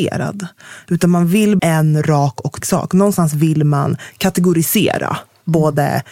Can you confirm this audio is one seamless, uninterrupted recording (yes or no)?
no